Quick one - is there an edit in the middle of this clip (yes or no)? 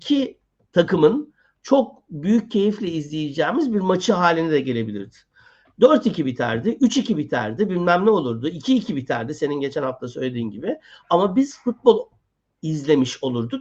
no